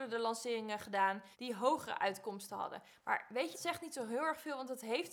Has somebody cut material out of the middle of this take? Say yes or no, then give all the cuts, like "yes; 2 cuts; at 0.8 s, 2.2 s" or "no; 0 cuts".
yes; 2 cuts; at 1.3 s, 3.5 s